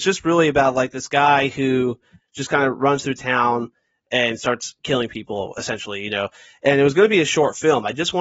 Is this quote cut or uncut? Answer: uncut